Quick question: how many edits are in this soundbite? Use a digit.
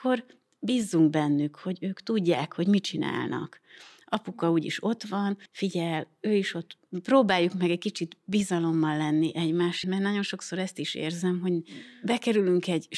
2